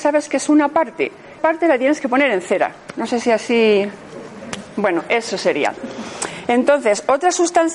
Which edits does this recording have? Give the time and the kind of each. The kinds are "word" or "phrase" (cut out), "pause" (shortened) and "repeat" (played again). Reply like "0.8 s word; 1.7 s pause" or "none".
1.4 s word